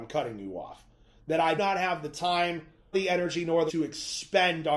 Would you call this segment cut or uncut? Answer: cut